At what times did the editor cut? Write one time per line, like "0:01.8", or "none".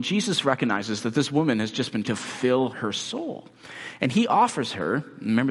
0:02.0
0:02.7